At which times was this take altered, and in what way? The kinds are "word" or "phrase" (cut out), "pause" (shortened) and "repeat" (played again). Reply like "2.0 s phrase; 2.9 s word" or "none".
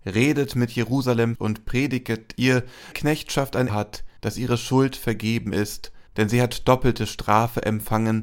1.3 s word; 2.9 s phrase; 3.7 s word; 4.2 s pause; 6.1 s pause